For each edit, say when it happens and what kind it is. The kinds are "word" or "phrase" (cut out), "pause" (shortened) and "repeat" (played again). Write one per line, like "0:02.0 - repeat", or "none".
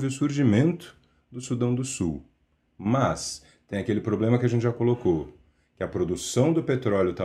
none